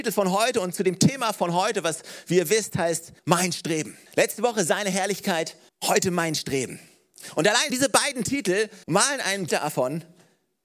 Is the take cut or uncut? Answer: cut